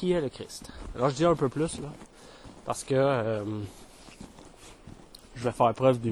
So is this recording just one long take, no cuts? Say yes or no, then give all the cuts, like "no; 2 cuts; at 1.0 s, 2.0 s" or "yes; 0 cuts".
yes; 0 cuts